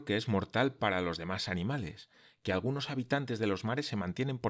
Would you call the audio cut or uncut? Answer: uncut